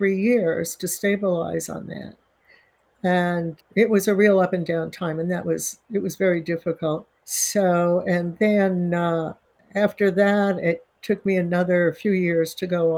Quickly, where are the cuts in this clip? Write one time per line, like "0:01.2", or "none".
0:03.6
0:07.2